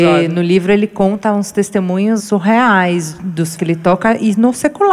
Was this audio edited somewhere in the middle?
yes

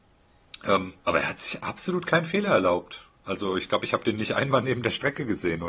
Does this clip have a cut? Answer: no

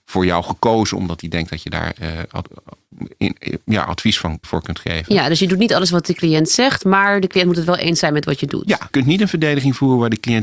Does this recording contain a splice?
yes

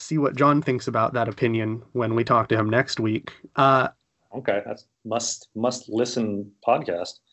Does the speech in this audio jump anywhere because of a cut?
yes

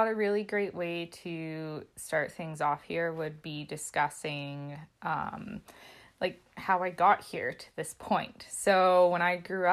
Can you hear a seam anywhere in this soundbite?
yes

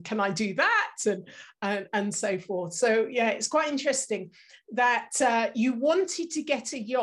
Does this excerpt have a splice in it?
no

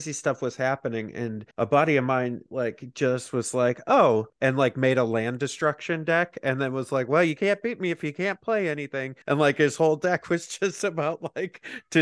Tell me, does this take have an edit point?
yes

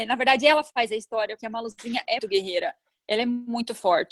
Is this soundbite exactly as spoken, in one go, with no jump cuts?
no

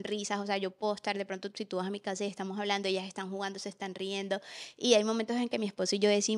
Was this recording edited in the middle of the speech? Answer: no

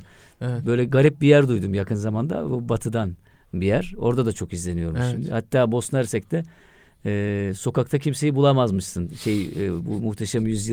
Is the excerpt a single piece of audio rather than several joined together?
yes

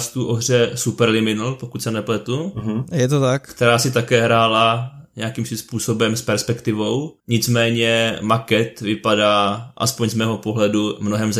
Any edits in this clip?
yes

